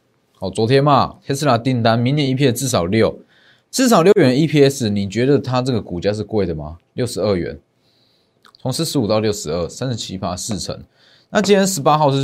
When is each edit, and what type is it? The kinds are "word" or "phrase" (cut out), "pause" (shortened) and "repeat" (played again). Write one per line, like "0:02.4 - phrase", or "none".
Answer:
none